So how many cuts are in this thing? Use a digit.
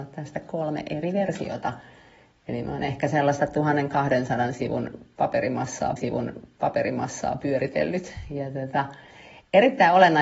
1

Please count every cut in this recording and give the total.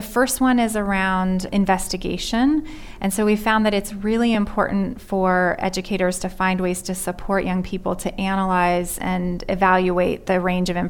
0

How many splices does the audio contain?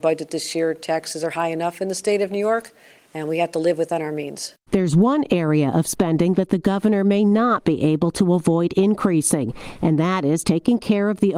0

